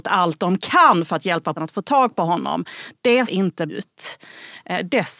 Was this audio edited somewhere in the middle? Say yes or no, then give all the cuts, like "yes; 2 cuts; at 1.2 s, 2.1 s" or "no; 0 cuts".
yes; 3 cuts; at 1.6 s, 3.3 s, 3.7 s